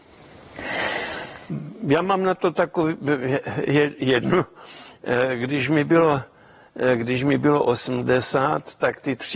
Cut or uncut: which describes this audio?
uncut